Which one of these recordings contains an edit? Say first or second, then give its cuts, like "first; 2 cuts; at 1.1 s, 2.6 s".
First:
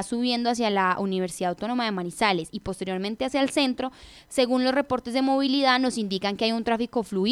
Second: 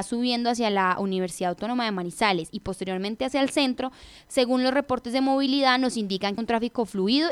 second; 1 cut; at 6.4 s